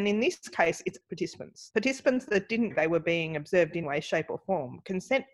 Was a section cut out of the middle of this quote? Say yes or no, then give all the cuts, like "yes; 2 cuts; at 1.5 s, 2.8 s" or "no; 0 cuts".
yes; 4 cuts; at 1.0 s, 1.7 s, 2.7 s, 3.8 s